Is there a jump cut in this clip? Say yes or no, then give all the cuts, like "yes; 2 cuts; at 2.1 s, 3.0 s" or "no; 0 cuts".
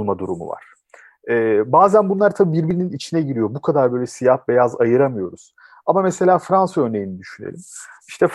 no; 0 cuts